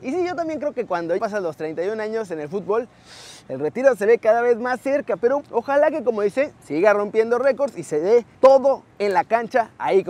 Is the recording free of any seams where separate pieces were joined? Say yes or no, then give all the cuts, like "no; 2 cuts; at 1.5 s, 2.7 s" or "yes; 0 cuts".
no; 4 cuts; at 1.2 s, 5.4 s, 6.6 s, 8.3 s